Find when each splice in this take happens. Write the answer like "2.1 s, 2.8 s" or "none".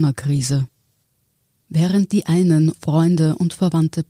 2.7 s